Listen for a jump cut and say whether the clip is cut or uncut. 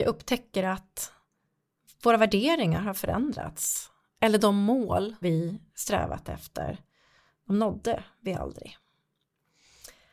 cut